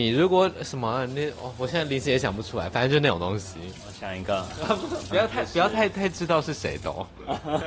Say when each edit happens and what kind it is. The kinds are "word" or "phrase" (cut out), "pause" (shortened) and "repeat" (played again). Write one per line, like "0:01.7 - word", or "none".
0:05.1 - word